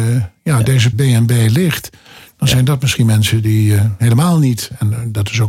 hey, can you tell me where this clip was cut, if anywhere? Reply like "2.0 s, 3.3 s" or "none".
0.9 s